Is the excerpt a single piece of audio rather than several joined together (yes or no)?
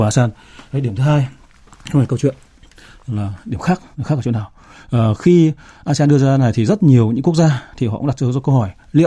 no